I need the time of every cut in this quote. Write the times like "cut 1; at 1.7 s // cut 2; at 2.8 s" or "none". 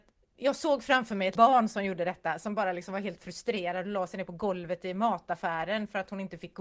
cut 1; at 1.4 s